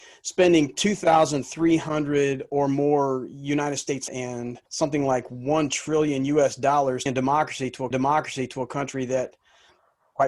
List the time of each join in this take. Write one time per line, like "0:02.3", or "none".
0:04.1
0:04.7
0:07.1
0:07.9